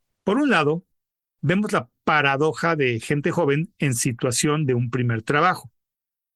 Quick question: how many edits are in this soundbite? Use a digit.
0